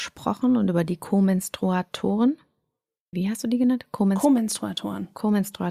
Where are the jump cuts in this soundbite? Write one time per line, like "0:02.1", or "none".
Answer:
0:03.1